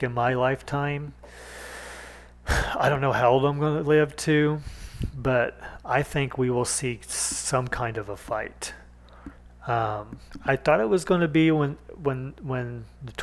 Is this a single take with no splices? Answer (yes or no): yes